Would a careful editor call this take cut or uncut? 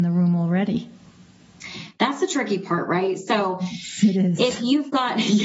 uncut